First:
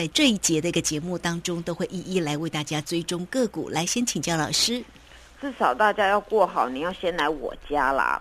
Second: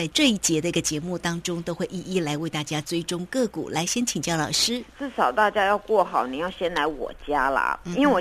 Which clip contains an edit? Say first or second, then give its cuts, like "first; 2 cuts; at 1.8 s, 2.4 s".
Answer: second; 1 cut; at 4.9 s